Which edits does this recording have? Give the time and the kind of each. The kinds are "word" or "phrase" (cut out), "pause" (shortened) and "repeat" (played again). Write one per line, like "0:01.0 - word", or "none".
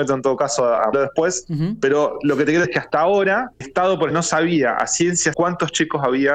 0:00.9 - word
0:02.6 - word
0:03.6 - word
0:04.1 - word
0:05.3 - word